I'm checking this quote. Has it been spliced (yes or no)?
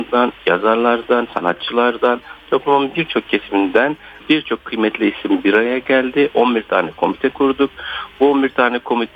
no